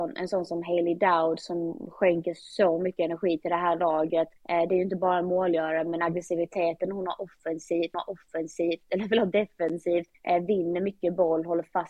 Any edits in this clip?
yes; 3 cuts; at 4.4 s, 7.9 s, 10.1 s

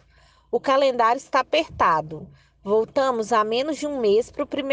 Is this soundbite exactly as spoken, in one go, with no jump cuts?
yes; 0 cuts

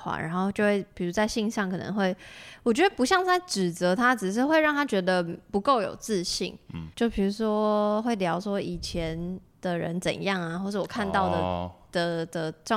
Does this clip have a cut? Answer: yes; 2 cuts; at 6.9 s, 9.5 s

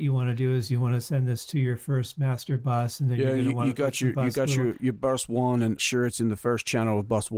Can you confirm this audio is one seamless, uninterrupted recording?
no; 1 cut; at 5.8 s

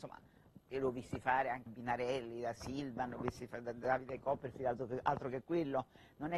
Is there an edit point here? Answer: yes; 1 cut; at 1.7 s

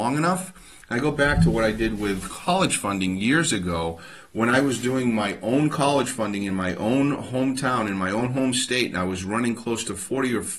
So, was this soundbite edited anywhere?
no; 0 cuts

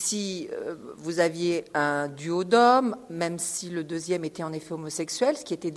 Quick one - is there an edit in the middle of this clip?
no; 0 cuts

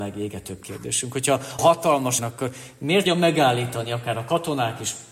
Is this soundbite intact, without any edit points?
no; 3 cuts; at 1.6 s, 2.2 s, 3.1 s

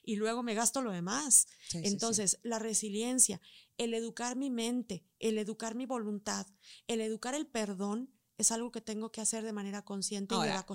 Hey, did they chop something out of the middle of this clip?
no; 0 cuts

